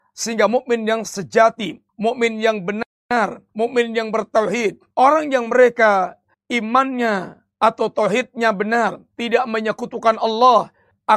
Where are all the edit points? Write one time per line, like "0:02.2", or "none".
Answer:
0:01.9
0:03.5
0:04.9
0:06.3
0:09.1